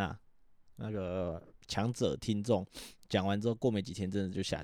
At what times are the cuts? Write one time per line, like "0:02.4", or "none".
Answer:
0:01.6